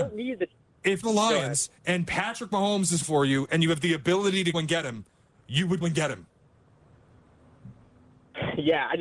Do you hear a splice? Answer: yes; 4 cuts; at 1.0 s, 3.0 s, 4.5 s, 5.8 s

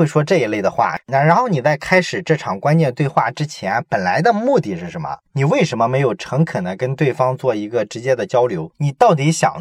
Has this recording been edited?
yes; 1 cut; at 1.0 s

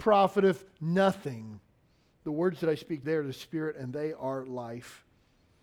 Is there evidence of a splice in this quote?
yes; 1 cut; at 3.0 s

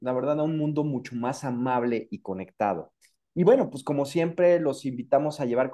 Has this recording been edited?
no; 0 cuts

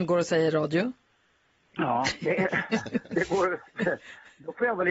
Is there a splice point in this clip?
no; 0 cuts

